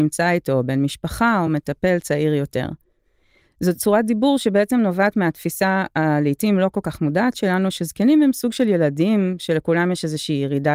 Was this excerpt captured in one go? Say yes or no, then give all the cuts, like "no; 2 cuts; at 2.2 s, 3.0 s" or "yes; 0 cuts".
yes; 0 cuts